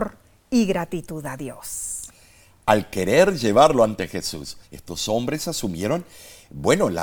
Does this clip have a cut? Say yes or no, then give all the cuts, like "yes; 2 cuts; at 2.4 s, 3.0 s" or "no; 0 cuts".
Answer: yes; 1 cut; at 4.6 s